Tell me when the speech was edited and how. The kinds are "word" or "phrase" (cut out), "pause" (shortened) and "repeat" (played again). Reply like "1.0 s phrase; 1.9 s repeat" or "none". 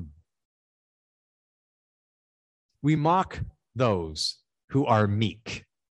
none